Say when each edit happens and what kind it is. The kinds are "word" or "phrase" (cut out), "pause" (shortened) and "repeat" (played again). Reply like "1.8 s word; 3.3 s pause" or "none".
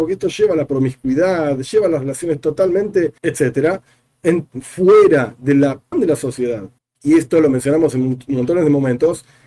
3.2 s pause; 5.9 s word; 6.8 s pause